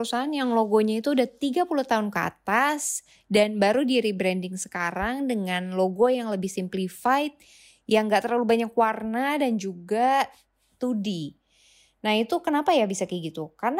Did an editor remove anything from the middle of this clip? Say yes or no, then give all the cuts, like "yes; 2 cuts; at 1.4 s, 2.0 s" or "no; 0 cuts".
no; 0 cuts